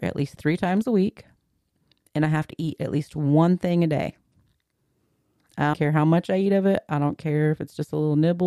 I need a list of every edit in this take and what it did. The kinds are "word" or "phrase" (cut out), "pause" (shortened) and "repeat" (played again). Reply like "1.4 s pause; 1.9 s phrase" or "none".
5.7 s word